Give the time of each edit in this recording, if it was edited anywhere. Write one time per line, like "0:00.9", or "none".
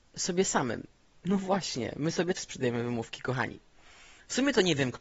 0:01.0
0:02.4

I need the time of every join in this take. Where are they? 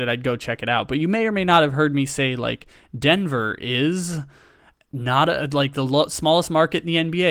none

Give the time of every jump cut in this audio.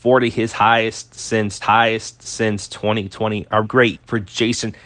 0:01.6
0:03.6
0:03.9

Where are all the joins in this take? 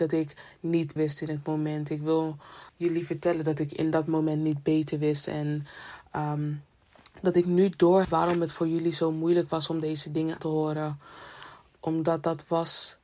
0:01.0
0:02.7
0:08.0
0:10.4

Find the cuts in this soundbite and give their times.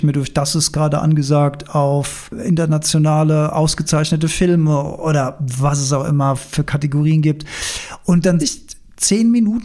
0:08.4

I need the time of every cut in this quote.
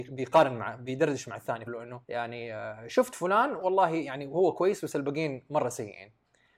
0:01.7
0:02.0

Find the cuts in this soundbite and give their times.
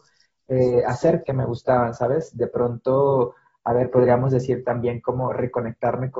0:01.2

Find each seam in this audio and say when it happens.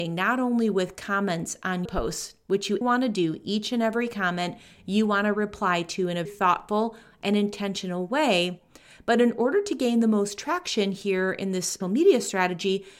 0:01.9
0:02.8
0:06.3
0:11.8

